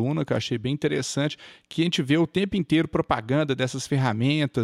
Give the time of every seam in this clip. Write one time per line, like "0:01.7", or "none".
none